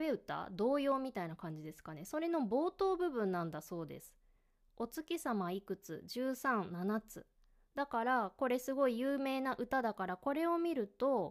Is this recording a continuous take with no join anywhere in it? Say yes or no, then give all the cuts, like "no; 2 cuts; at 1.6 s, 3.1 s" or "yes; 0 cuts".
yes; 0 cuts